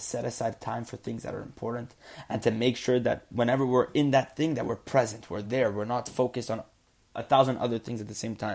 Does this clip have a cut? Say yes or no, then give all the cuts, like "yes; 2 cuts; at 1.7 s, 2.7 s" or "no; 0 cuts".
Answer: no; 0 cuts